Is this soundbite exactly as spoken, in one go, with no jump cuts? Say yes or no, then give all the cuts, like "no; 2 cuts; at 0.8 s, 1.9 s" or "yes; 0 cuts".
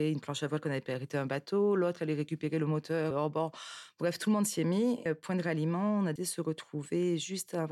no; 3 cuts; at 3.1 s, 5.1 s, 6.2 s